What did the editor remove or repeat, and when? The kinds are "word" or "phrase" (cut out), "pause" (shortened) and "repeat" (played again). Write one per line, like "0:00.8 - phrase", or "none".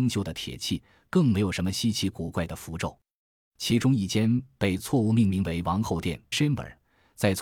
0:06.3 - word